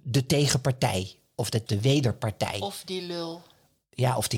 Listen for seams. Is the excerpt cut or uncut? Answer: cut